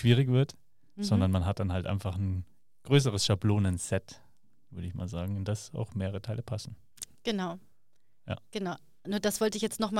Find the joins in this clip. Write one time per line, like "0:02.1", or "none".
none